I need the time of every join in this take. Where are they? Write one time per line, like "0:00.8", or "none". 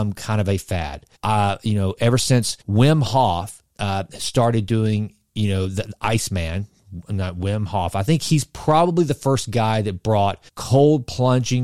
0:01.1
0:02.6
0:03.7
0:10.5